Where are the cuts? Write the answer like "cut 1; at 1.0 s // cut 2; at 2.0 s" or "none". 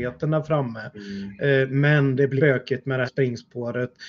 cut 1; at 2.4 s // cut 2; at 3.0 s